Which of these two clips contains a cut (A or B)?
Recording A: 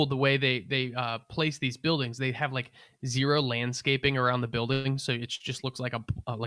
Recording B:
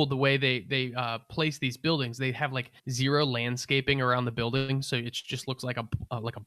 B